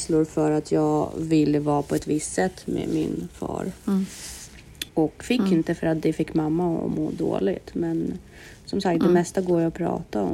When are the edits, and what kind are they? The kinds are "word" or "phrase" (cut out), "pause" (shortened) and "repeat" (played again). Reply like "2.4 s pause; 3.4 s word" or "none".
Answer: 4.9 s pause